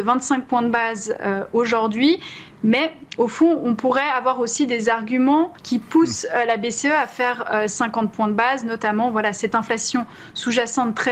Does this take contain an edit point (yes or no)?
yes